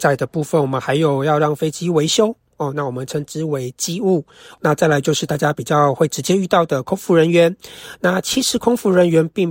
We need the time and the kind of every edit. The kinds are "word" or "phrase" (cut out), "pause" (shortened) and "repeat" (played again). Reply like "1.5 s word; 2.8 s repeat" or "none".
none